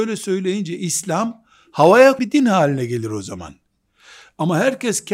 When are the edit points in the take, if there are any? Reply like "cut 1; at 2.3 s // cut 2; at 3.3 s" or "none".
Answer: cut 1; at 2.2 s